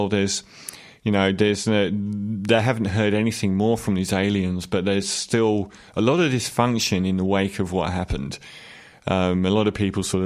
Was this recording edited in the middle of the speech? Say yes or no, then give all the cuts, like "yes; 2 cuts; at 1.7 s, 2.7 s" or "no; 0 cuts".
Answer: no; 0 cuts